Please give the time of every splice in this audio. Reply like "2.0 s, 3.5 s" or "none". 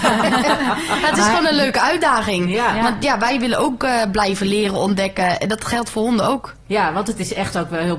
none